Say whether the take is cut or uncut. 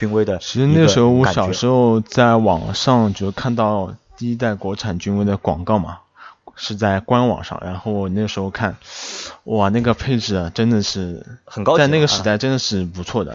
uncut